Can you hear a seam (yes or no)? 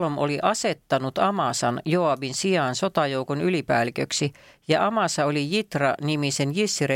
no